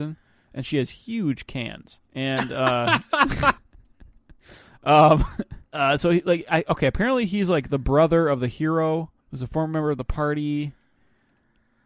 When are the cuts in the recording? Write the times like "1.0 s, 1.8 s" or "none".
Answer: 2.1 s, 3.6 s, 5.7 s, 9.2 s